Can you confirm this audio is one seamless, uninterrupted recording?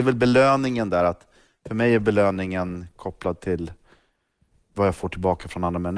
yes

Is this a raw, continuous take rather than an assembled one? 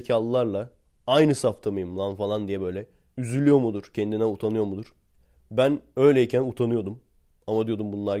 yes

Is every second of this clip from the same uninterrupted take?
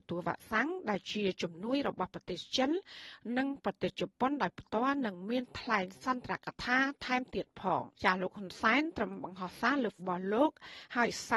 no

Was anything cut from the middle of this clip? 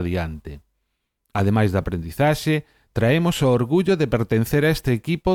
no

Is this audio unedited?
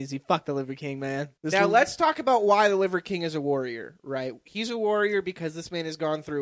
no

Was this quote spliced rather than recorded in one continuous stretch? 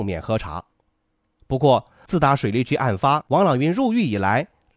no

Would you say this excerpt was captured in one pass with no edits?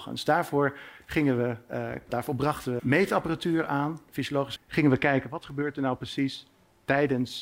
no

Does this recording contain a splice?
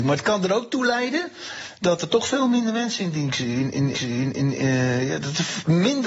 yes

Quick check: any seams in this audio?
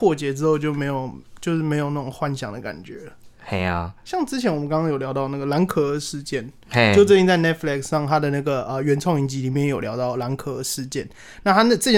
no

